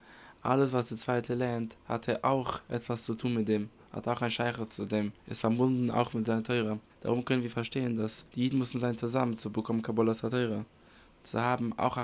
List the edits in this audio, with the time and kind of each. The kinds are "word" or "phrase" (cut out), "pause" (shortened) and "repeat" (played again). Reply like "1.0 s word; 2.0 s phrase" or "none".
5.2 s pause; 6.9 s pause; 8.3 s pause